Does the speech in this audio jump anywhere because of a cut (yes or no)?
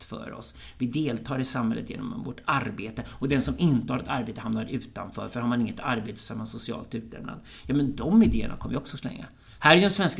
no